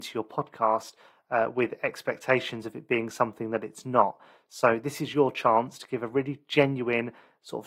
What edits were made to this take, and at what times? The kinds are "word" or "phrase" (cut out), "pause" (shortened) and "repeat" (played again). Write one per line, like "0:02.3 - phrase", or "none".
none